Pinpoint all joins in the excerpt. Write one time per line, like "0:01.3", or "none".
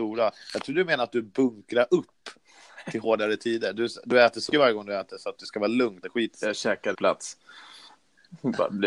0:04.5
0:06.0
0:06.9

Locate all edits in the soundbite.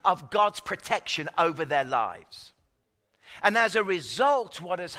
none

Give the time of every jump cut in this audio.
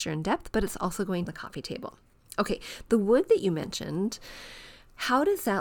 0:01.3

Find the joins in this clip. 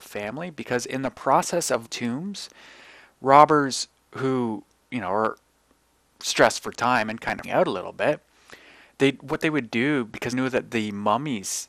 0:01.8
0:07.4
0:10.3

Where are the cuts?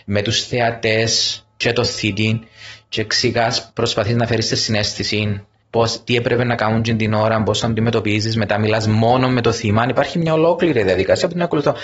0:03.7
0:05.6

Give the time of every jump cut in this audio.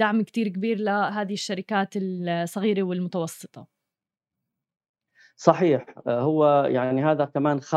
none

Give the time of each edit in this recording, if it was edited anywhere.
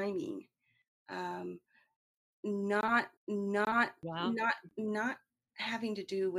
0:03.2

